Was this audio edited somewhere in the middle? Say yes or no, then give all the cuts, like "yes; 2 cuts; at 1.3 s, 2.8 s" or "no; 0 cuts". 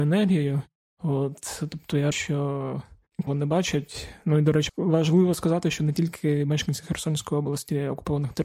yes; 3 cuts; at 2.1 s, 3.3 s, 4.7 s